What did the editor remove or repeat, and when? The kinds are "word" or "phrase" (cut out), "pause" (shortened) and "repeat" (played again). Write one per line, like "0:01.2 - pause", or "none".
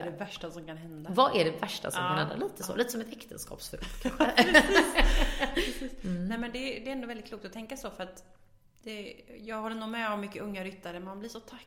none